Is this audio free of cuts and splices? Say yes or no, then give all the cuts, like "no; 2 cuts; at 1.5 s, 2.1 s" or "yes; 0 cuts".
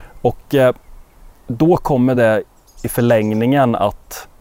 yes; 0 cuts